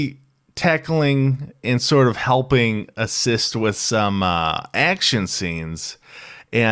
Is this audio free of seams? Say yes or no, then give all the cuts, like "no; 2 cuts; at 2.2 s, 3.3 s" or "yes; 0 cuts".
yes; 0 cuts